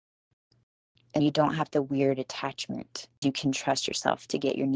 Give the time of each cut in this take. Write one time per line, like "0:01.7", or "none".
0:01.2
0:01.7
0:03.2